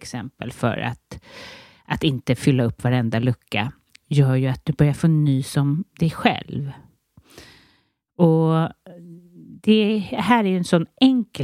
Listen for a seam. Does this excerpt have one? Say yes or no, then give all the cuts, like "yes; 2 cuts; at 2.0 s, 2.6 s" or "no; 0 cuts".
no; 0 cuts